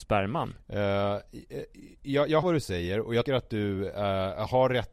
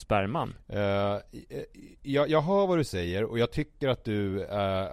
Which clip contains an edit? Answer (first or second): first